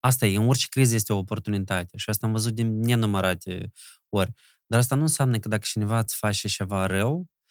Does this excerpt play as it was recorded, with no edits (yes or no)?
yes